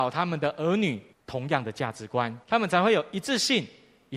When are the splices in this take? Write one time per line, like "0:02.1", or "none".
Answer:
0:01.1
0:02.4